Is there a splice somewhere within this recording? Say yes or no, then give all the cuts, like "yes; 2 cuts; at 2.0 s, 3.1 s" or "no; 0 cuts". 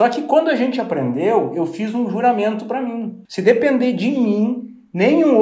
yes; 1 cut; at 3.2 s